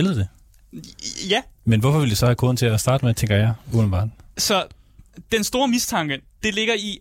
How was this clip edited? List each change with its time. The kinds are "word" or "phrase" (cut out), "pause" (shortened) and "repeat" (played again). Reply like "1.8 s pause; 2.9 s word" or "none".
none